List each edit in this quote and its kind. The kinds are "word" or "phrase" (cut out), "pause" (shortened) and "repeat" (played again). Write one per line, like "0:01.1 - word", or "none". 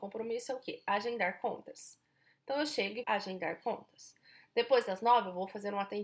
0:03.0 - word